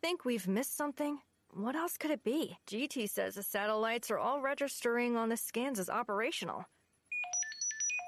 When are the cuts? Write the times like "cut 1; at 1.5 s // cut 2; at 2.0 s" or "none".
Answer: cut 1; at 1.3 s // cut 2; at 2.6 s